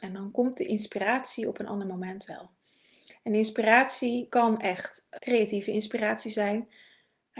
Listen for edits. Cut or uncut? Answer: cut